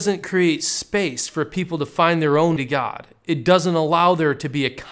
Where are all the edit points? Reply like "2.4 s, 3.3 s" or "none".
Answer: 2.6 s